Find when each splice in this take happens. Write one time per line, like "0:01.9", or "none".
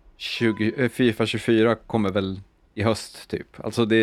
none